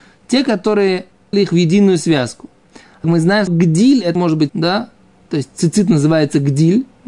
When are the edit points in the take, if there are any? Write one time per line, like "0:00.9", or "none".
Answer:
0:01.3
0:03.0
0:03.5
0:04.2
0:04.5